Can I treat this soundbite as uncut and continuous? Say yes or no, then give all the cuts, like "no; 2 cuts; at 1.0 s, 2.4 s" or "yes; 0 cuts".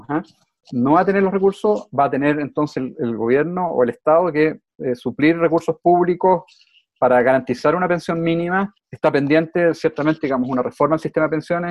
no; 1 cut; at 8.8 s